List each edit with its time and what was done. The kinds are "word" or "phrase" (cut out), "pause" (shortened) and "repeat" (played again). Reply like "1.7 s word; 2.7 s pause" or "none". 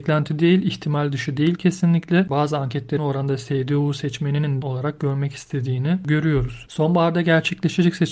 3.0 s phrase; 4.6 s phrase